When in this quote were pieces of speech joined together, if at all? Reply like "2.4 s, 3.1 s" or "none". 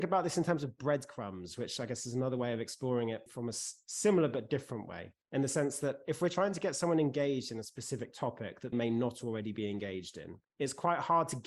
3.3 s, 5.2 s, 8.7 s, 10.4 s